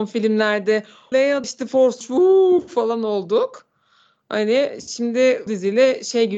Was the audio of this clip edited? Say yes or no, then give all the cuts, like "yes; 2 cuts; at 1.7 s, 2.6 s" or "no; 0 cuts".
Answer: yes; 4 cuts; at 1.1 s, 1.4 s, 2.0 s, 5.5 s